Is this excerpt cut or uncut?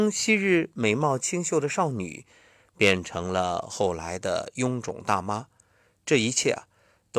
uncut